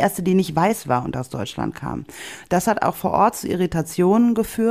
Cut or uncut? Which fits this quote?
uncut